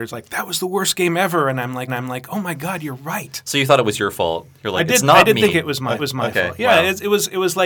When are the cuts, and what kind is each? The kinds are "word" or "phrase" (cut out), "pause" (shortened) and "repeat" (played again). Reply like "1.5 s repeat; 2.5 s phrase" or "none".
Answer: 1.9 s repeat; 6.0 s repeat